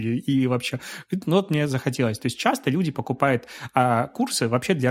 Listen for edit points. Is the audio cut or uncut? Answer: uncut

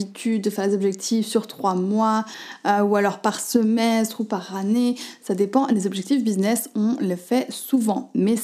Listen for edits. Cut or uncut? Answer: uncut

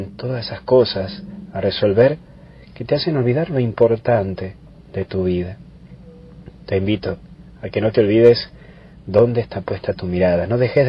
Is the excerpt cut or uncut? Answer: uncut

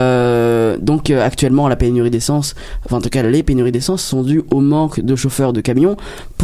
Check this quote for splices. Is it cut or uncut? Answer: uncut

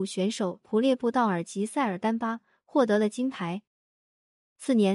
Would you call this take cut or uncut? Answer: uncut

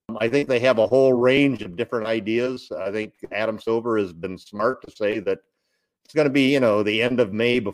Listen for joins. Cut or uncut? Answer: uncut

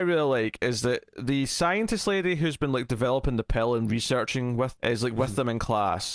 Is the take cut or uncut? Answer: cut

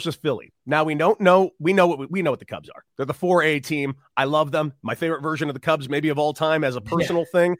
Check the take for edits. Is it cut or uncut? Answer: cut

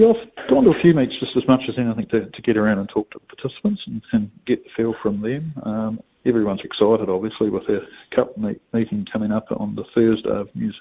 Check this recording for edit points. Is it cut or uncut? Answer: cut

